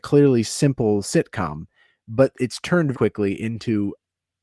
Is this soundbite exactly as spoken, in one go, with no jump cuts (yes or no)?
no